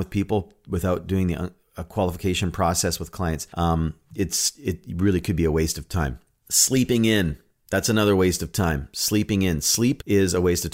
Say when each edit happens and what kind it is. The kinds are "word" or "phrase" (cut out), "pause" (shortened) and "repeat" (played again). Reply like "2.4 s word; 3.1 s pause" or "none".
none